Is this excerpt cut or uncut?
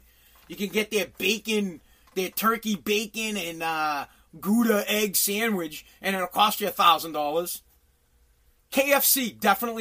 uncut